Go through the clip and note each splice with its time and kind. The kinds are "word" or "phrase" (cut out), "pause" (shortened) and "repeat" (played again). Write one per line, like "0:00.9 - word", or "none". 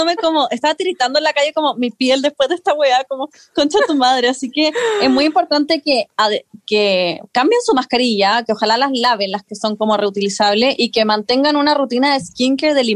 none